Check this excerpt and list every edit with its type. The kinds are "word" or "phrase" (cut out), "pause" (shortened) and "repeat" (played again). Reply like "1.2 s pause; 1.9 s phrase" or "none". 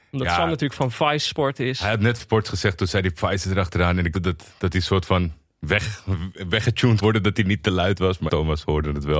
2.2 s word; 4.1 s word; 7.0 s word; 8.3 s word

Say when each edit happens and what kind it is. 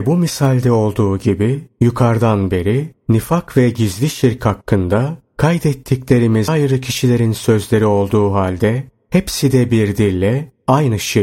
6.5 s word

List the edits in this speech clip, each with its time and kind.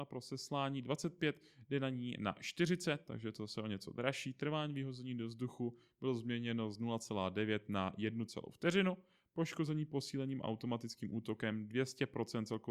none

